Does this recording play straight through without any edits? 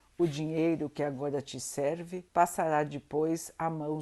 no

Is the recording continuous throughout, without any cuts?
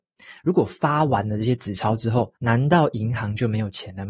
no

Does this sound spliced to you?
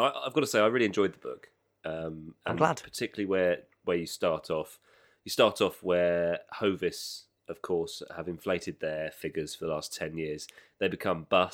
no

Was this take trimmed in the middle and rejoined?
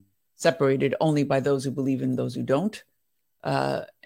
no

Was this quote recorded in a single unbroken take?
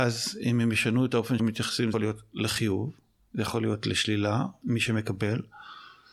no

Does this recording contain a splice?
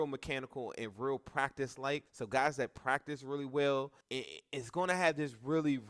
yes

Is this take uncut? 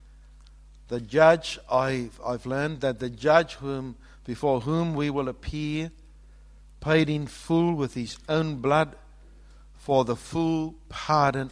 yes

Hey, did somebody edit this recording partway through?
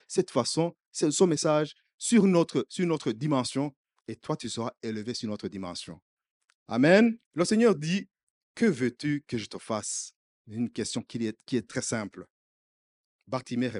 yes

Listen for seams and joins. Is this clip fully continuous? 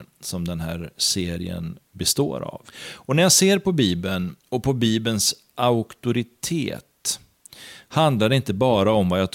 no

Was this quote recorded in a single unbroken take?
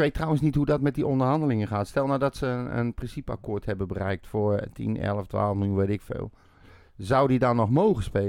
yes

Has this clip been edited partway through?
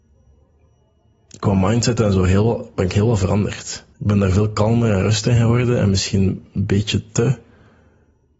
yes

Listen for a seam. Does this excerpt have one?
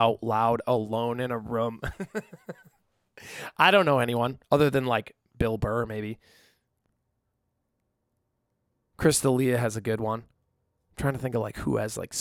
no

